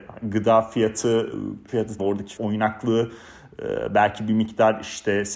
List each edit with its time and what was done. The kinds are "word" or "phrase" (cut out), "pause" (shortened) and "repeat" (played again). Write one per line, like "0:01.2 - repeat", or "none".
0:01.7 - word
0:02.0 - word
0:02.4 - word